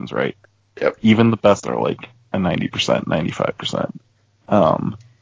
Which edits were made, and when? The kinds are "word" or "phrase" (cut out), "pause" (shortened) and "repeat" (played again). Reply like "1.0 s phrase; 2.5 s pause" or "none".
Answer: 1.6 s word